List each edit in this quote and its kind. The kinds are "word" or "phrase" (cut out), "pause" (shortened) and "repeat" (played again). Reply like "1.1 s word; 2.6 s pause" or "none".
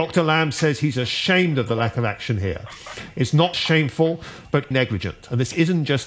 3.5 s word; 4.7 s word